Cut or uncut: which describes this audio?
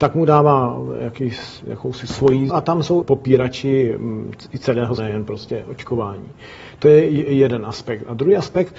cut